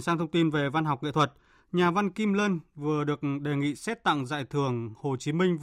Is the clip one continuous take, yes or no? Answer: yes